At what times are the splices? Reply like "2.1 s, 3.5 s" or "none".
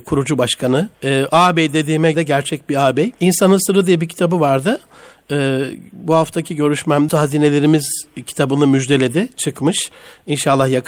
0.9 s, 2.1 s, 3.1 s, 7.1 s